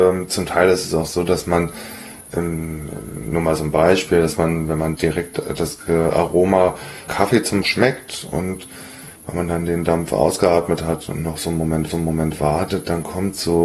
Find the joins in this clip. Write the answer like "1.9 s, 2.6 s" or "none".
5.0 s, 7.1 s, 7.6 s, 9.2 s, 11.9 s